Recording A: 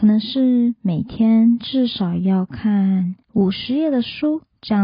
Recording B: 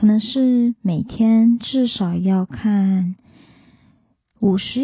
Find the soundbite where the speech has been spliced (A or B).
A